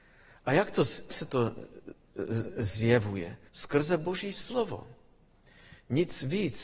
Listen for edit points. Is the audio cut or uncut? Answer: cut